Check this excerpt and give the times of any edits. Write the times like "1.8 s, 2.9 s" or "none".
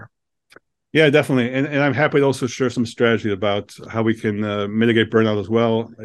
none